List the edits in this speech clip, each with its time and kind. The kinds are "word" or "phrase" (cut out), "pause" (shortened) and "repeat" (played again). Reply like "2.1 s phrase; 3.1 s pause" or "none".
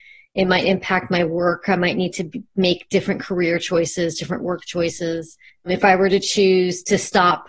2.5 s pause; 5.5 s pause